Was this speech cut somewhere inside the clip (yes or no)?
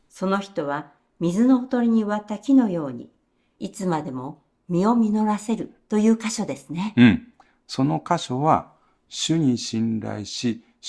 no